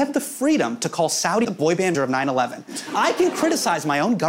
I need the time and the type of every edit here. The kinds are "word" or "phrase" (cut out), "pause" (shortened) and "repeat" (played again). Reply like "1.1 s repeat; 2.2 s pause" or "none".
1.4 s word; 1.9 s word